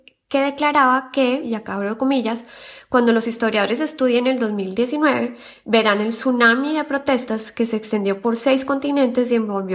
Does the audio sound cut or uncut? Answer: uncut